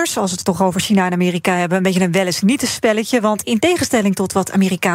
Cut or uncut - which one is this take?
uncut